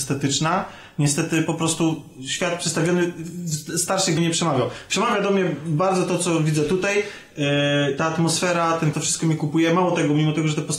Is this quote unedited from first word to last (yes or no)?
no